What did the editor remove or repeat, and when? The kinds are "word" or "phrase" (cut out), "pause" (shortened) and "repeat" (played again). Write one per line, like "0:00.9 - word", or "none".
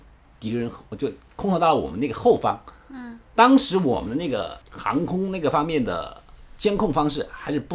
0:03.3 - pause
0:04.6 - pause